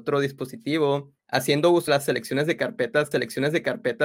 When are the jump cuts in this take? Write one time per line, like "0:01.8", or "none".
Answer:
0:01.2
0:01.9
0:03.1

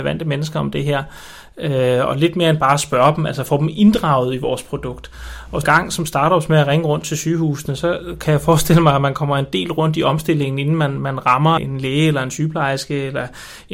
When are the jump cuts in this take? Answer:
0:05.6
0:11.6

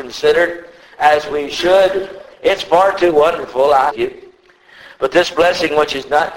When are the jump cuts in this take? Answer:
0:03.9

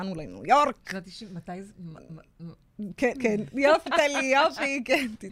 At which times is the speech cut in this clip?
0:03.1
0:03.9

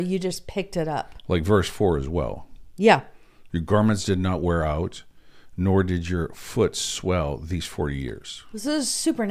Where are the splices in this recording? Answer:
none

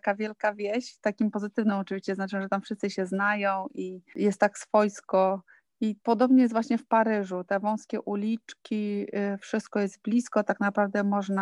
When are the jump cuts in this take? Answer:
0:06.0

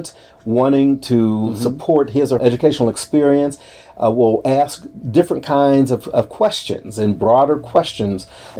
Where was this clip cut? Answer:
0:02.4

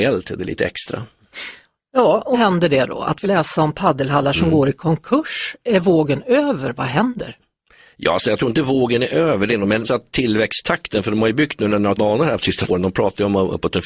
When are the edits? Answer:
0:02.3
0:03.2
0:09.8
0:12.0
0:12.7

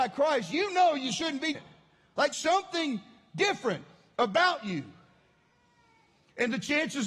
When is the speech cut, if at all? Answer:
0:01.5
0:02.3

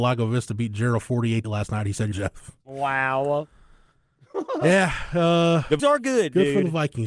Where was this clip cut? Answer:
0:01.4
0:02.1
0:02.6
0:05.8

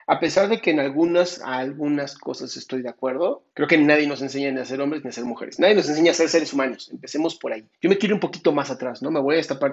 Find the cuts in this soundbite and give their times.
0:03.5
0:07.7

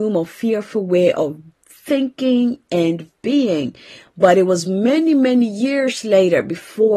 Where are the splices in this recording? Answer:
none

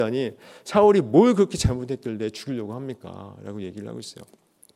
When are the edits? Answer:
none

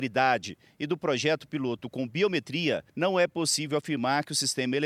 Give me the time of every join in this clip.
0:02.9

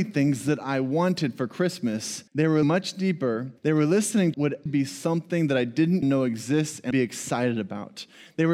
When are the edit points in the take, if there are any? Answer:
0:02.3
0:02.6
0:03.6
0:04.3
0:04.7
0:06.0
0:06.9

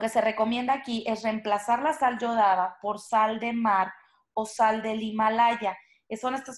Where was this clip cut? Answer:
none

